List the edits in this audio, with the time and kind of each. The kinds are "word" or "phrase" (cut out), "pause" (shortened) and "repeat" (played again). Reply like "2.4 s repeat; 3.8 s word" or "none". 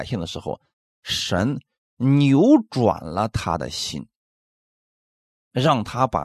none

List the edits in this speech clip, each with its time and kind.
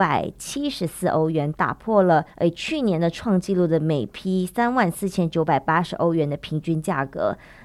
2.3 s pause

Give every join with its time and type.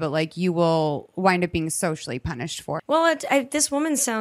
2.8 s word

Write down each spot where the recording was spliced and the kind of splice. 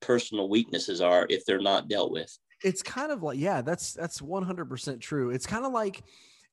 none

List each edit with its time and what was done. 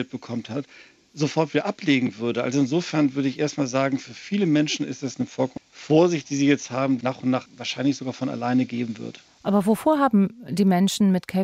5.6 s word; 7.0 s word; 7.5 s word

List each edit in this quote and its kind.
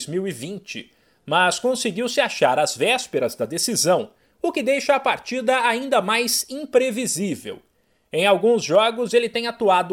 none

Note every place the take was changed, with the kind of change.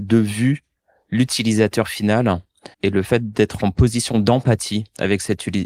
2.7 s pause

